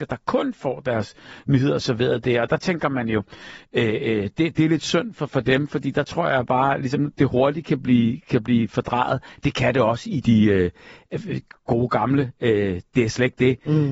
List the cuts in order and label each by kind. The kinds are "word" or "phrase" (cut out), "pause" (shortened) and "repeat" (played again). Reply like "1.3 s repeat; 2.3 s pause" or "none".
10.2 s phrase